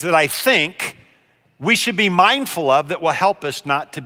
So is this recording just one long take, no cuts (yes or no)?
yes